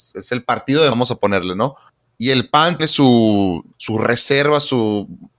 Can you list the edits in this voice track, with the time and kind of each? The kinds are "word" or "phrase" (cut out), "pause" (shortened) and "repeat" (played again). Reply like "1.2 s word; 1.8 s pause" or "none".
0.9 s word; 1.9 s pause; 2.8 s phrase; 3.7 s pause